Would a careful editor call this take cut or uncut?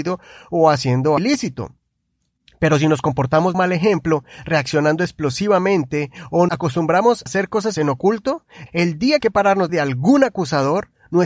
cut